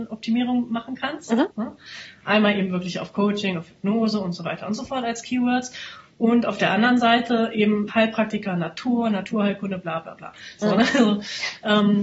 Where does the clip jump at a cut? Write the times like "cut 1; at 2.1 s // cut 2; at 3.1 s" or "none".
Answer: cut 1; at 7.9 s